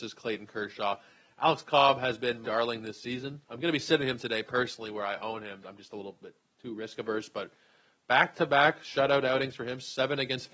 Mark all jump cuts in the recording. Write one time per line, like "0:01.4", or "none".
0:02.4
0:05.6

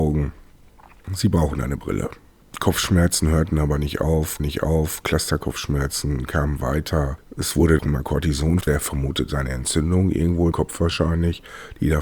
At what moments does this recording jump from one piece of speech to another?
0:04.4
0:07.8
0:08.6
0:10.5

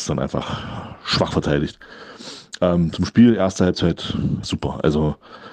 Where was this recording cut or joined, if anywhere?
0:04.4

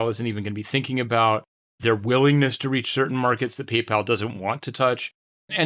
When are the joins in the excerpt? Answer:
none

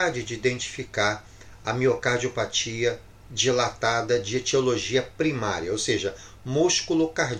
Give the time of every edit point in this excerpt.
none

